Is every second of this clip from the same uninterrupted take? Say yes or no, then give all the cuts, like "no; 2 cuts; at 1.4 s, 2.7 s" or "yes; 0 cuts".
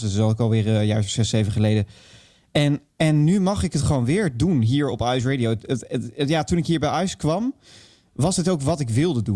yes; 0 cuts